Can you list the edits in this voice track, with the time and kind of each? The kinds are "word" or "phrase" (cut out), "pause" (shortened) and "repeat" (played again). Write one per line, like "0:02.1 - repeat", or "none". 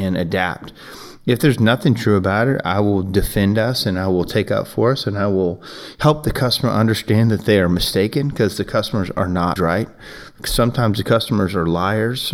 0:09.6 - word